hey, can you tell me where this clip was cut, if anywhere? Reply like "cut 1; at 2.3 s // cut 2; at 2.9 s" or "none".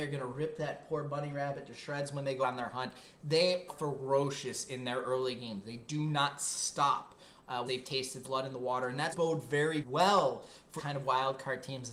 cut 1; at 2.4 s // cut 2; at 3.7 s // cut 3; at 7.7 s // cut 4; at 8.2 s // cut 5; at 9.1 s // cut 6; at 9.8 s // cut 7; at 10.8 s